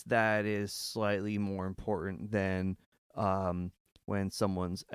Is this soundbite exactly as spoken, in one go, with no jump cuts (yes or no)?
yes